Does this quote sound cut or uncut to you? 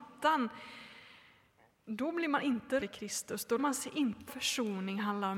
cut